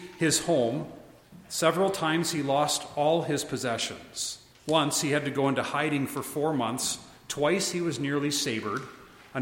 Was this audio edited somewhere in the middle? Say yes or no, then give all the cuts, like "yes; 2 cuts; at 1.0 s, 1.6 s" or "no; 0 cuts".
yes; 1 cut; at 4.5 s